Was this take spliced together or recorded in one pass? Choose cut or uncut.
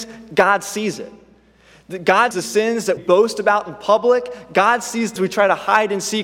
cut